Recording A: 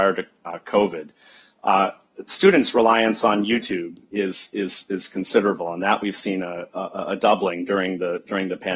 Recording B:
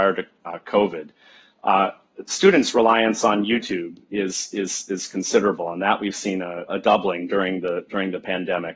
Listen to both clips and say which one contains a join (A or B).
B